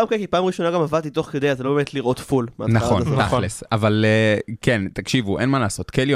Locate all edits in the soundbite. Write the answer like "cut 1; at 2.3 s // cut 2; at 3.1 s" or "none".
none